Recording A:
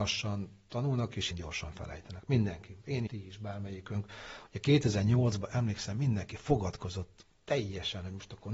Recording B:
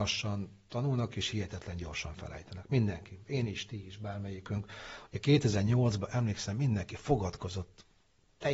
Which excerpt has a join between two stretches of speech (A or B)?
A